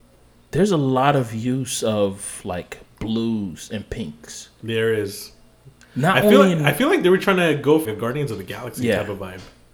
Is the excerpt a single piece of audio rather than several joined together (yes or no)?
no